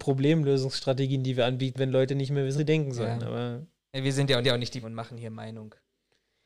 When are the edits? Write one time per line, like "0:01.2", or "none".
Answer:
0:01.7
0:02.6
0:04.4
0:04.8